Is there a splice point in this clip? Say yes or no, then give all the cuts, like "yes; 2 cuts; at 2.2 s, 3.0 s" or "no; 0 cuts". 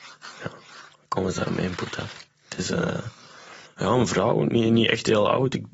yes; 2 cuts; at 2.3 s, 3.7 s